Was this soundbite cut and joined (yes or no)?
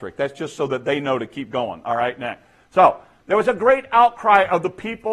no